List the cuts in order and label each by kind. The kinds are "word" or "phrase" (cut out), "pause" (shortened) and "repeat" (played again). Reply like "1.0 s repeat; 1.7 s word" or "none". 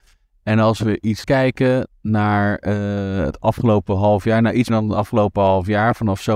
1.2 s word; 4.7 s word